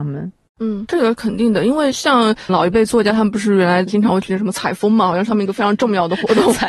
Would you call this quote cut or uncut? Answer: cut